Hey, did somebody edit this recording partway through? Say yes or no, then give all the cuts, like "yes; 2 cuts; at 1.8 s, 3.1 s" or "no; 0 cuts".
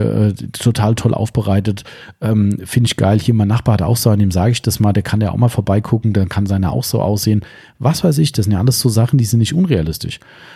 no; 0 cuts